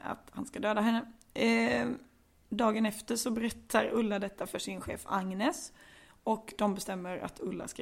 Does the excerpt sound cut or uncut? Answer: uncut